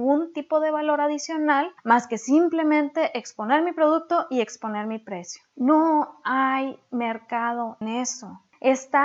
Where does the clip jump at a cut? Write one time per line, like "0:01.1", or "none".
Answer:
0:01.8
0:07.8